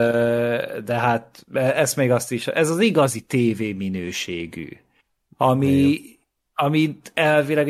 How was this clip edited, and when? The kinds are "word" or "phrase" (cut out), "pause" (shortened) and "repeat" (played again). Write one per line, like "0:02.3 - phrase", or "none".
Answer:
none